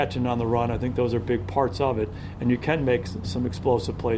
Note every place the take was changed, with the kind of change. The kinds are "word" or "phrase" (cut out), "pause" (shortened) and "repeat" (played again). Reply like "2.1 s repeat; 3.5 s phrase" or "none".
none